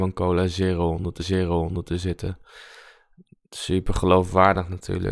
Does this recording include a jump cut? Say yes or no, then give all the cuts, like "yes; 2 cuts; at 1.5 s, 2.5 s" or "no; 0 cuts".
yes; 1 cut; at 1.2 s